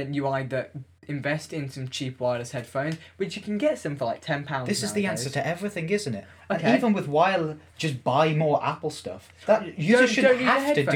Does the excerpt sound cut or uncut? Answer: uncut